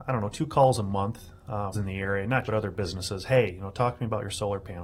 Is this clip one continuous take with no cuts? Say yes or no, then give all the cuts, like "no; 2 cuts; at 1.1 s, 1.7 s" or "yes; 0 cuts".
no; 2 cuts; at 1.7 s, 2.4 s